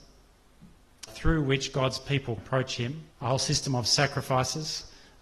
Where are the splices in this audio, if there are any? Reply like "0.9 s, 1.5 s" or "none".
1.1 s, 2.4 s, 3.1 s